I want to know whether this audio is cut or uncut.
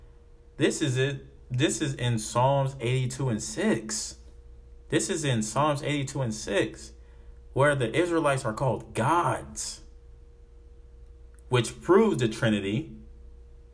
uncut